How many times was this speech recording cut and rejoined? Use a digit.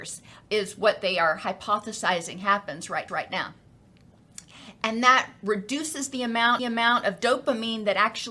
2